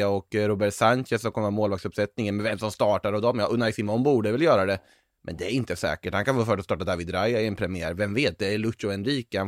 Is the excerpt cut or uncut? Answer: uncut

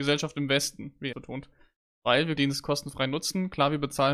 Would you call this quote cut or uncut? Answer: cut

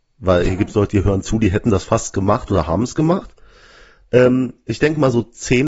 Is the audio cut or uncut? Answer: uncut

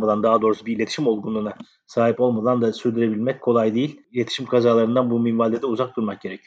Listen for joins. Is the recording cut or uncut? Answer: uncut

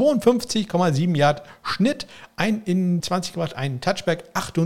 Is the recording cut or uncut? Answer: cut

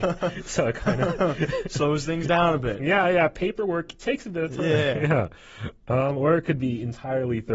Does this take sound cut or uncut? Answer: uncut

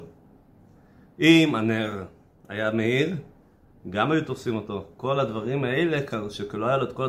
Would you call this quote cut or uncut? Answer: uncut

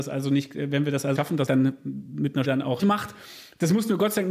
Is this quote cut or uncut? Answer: cut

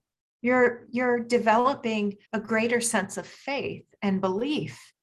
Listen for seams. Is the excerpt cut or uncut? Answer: cut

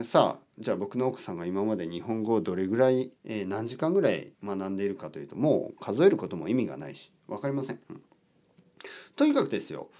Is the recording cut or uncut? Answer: cut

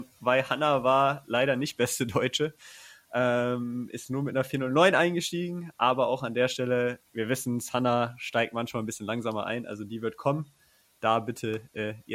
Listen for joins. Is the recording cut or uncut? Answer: uncut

